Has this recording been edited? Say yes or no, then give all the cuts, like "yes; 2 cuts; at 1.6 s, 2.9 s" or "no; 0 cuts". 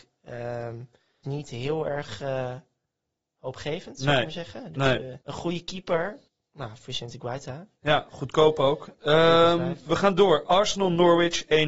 yes; 3 cuts; at 1.2 s, 5.2 s, 6.3 s